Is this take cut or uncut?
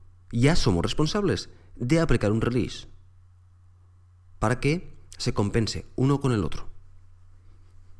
uncut